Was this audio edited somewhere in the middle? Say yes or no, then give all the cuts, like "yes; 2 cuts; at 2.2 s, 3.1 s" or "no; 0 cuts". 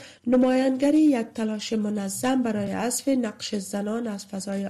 no; 0 cuts